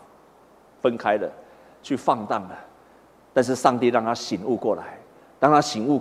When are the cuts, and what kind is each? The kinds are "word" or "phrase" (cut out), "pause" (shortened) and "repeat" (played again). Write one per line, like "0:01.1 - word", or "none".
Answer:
none